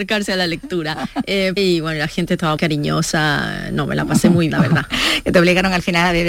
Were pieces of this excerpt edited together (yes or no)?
yes